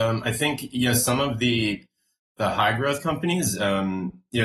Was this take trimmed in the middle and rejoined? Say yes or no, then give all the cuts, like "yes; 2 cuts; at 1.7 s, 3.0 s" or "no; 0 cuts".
no; 0 cuts